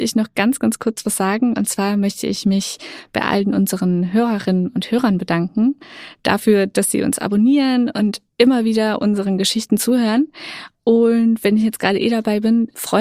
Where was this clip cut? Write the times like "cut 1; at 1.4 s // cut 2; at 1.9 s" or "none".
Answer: none